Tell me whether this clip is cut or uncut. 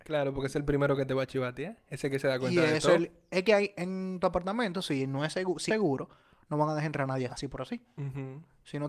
cut